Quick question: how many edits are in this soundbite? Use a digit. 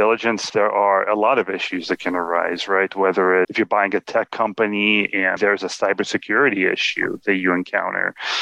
2